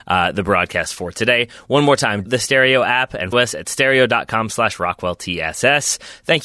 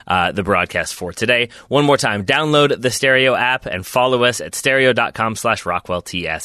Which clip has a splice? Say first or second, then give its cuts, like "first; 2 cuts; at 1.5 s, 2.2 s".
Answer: first; 2 cuts; at 2.3 s, 3.3 s